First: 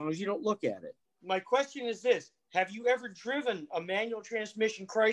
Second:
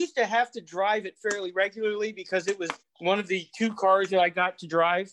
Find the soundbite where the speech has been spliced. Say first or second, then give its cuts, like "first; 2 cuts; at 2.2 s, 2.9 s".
second; 1 cut; at 2.8 s